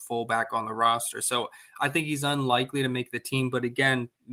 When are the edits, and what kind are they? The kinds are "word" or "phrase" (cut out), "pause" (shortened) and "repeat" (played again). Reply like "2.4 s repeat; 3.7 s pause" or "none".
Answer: none